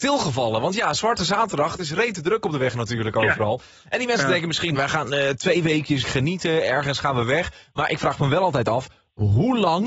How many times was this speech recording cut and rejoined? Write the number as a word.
two